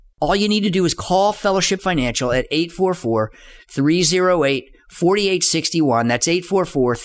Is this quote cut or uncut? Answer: uncut